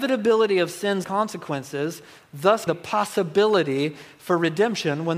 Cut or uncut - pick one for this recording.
cut